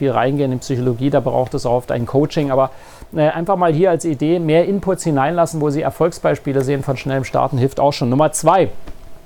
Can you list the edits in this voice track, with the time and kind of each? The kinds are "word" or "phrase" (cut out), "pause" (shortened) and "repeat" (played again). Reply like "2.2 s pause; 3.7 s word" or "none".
none

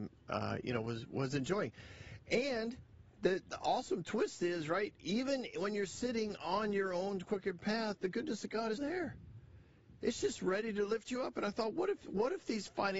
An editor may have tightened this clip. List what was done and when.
8.8 s word

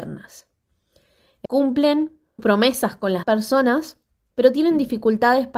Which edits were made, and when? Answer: 1.5 s word; 2.4 s word; 3.2 s word

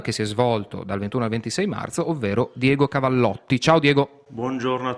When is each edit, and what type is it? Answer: none

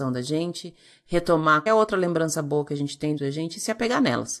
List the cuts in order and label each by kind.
1.7 s word; 3.2 s word

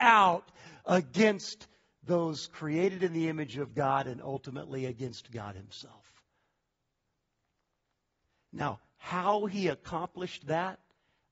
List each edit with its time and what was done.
none

